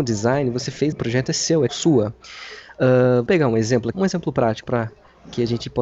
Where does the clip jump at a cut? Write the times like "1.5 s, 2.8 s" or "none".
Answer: 0.9 s, 1.7 s, 3.3 s, 3.9 s, 4.6 s